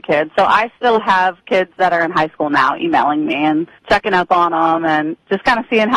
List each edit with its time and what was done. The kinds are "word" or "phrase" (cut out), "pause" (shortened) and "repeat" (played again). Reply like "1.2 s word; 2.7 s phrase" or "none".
3.8 s pause